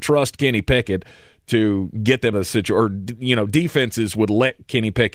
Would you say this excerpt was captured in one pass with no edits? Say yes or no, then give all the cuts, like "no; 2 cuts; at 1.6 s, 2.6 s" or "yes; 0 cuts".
no; 1 cut; at 2.3 s